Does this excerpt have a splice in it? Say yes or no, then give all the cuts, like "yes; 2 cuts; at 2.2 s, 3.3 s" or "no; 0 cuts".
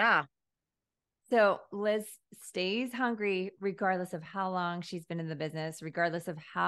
no; 0 cuts